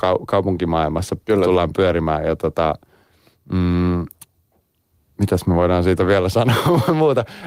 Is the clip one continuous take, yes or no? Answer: yes